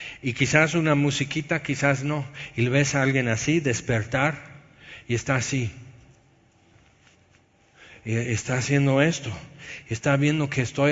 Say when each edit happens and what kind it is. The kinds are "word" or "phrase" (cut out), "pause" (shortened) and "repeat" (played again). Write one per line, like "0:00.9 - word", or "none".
none